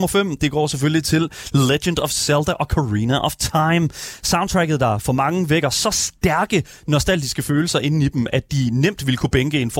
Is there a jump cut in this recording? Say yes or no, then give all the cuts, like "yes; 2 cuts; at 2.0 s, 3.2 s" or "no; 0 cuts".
no; 0 cuts